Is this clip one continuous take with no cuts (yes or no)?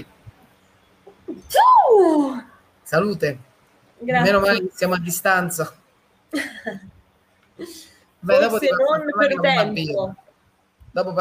no